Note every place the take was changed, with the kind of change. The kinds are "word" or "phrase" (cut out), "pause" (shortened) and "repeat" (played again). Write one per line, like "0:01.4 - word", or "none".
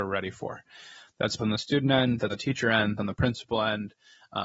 0:01.4 - word
0:02.3 - word
0:03.0 - word